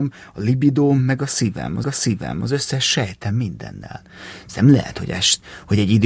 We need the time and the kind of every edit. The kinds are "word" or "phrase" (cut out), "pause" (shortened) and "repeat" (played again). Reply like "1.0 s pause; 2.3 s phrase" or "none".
1.8 s repeat